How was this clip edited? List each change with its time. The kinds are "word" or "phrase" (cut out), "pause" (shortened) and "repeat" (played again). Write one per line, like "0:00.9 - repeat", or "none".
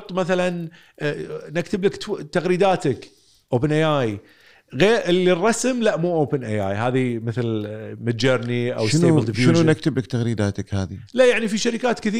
none